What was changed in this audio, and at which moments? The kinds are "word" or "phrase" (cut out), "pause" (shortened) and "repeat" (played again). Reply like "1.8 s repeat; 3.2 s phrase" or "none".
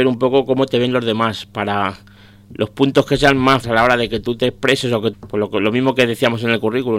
3.6 s word; 5.1 s word